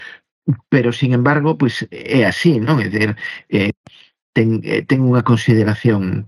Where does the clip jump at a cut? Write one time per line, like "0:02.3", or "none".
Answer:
none